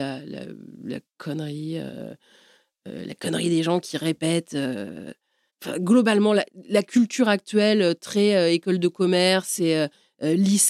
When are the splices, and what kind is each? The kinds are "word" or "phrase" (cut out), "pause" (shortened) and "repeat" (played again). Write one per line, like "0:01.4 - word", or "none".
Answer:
none